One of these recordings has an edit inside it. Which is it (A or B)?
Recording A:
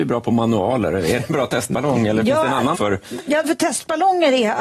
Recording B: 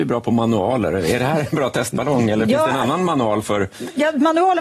A